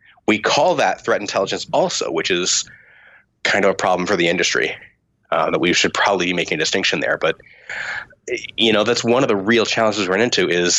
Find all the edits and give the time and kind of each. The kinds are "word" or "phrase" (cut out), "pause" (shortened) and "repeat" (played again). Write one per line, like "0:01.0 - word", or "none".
none